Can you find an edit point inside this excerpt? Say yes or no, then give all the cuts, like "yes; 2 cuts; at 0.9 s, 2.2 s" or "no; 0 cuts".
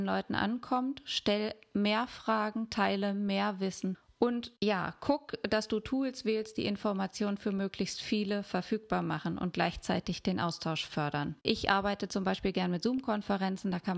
yes; 2 cuts; at 4.6 s, 11.4 s